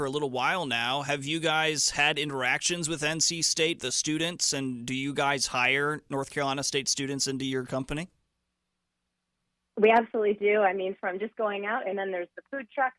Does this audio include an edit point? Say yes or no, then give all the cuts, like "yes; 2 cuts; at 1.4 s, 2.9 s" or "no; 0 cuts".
no; 0 cuts